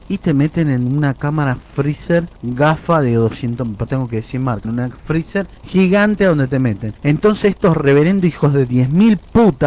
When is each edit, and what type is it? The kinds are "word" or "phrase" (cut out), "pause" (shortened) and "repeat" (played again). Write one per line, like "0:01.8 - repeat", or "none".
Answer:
0:02.4 - pause
0:03.9 - word
0:04.6 - word
0:05.6 - pause
0:07.0 - pause